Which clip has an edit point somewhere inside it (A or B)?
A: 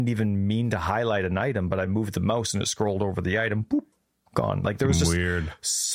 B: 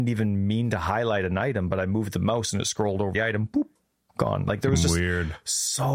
B